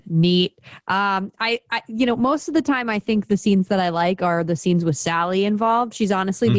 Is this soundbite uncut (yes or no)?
yes